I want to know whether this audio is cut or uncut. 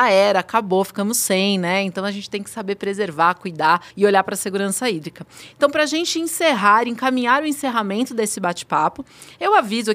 cut